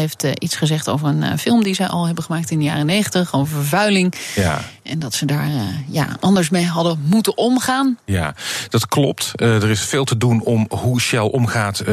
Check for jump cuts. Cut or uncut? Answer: cut